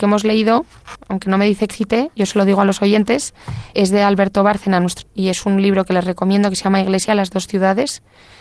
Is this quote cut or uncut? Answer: cut